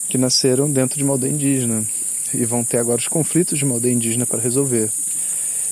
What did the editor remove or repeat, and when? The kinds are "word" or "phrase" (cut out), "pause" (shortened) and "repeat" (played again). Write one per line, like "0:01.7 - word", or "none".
0:02.3 - word